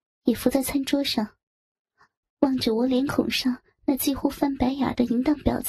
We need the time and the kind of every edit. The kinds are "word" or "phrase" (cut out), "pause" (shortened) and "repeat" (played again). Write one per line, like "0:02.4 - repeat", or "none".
none